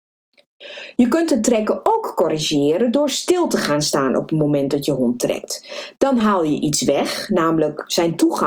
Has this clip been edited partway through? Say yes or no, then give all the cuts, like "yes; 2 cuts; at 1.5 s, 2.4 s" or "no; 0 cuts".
no; 0 cuts